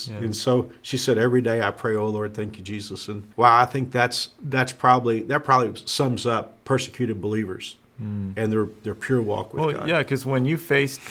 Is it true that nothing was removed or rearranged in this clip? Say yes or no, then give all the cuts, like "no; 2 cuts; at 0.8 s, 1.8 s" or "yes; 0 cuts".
no; 2 cuts; at 3.3 s, 6.6 s